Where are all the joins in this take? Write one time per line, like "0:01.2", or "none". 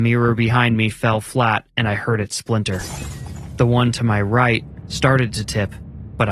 none